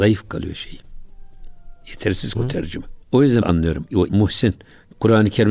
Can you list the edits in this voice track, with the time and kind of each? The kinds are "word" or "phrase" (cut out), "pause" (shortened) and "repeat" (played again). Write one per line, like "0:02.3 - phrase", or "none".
0:02.3 - word
0:03.0 - pause
0:03.4 - phrase
0:04.1 - word